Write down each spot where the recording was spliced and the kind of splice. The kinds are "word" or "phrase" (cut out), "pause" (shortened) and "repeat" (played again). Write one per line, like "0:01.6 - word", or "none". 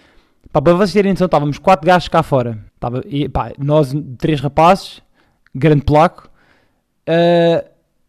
0:02.7 - pause

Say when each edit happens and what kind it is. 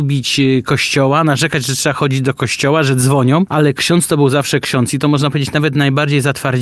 none

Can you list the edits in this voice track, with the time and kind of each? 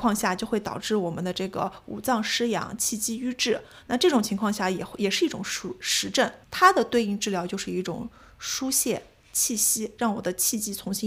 0:06.4 - pause

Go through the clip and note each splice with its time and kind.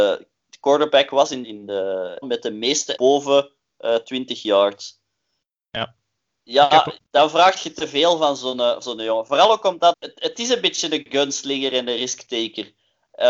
0:01.4 - word
0:02.2 - word
0:03.0 - word
0:07.0 - word
0:08.8 - word
0:09.9 - word

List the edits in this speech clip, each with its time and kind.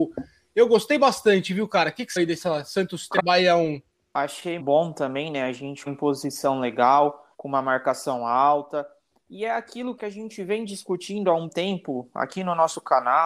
0:02.2 - word
0:03.2 - word
0:04.6 - word
0:05.9 - phrase
0:07.3 - pause
0:10.0 - word
0:11.5 - word

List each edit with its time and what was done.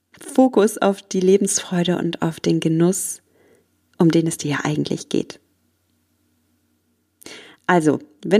none

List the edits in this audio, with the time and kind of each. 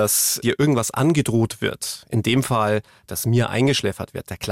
none

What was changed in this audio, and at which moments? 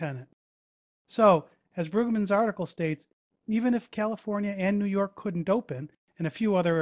none

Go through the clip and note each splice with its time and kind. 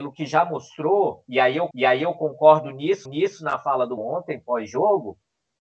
0:01.7 - repeat
0:03.1 - repeat
0:04.0 - word

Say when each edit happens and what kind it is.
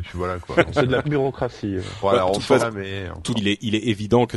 0:01.0 - word
0:02.6 - word
0:03.4 - word

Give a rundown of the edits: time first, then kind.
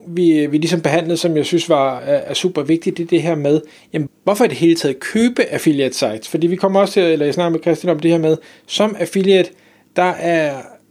0:02.0 - word
0:04.1 - word

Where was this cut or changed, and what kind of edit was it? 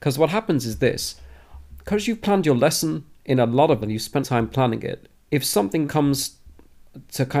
0:01.7 - word
0:03.1 - pause
0:03.8 - word
0:04.2 - phrase
0:05.1 - pause
0:05.9 - word

